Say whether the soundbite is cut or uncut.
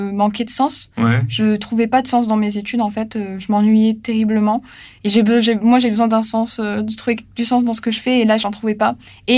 uncut